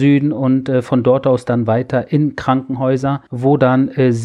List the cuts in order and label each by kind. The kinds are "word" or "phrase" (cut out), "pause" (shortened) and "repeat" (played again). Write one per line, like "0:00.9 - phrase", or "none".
0:03.3 - pause